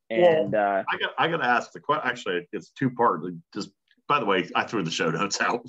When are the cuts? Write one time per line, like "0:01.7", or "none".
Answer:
0:03.4